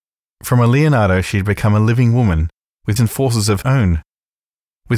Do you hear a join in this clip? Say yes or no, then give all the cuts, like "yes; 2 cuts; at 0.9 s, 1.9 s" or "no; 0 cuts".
yes; 2 cuts; at 3.0 s, 3.6 s